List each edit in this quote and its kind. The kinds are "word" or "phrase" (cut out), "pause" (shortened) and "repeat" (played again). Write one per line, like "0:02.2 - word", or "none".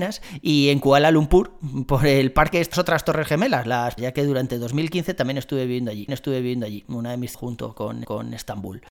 0:02.7 - phrase
0:04.0 - word
0:06.1 - repeat
0:07.3 - phrase
0:08.0 - repeat